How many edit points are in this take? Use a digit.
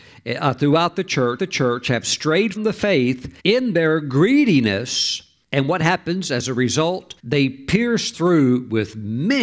6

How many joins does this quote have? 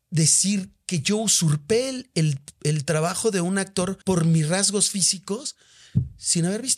1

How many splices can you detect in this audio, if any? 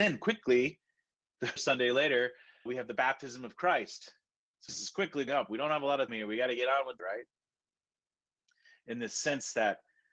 6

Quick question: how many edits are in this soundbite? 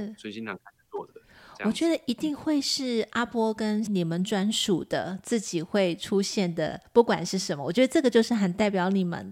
1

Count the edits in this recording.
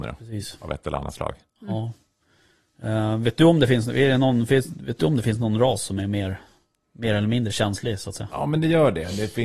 0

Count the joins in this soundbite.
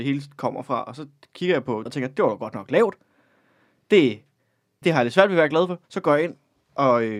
3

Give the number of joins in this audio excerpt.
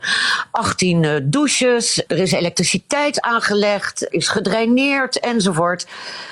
2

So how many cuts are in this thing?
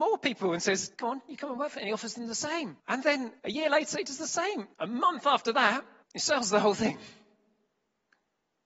5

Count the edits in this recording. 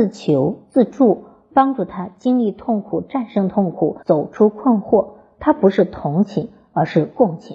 1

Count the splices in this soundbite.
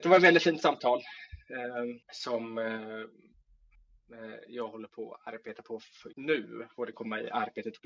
3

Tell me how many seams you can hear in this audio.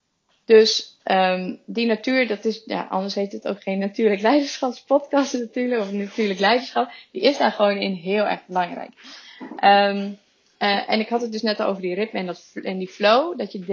0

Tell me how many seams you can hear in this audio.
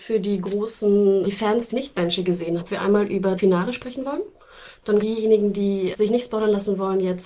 6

